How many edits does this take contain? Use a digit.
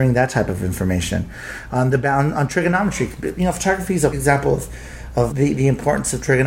2